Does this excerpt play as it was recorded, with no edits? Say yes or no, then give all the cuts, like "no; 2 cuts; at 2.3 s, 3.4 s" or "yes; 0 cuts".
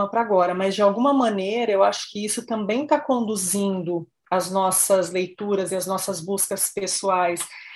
yes; 0 cuts